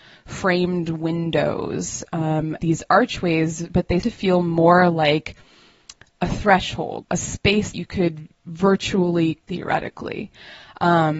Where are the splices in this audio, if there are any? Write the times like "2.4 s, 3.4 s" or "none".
2.6 s, 3.7 s, 4.0 s, 7.0 s, 7.7 s, 9.4 s